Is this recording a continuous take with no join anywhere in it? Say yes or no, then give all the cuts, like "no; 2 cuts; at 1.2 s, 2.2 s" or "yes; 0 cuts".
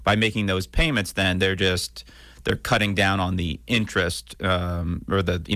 yes; 0 cuts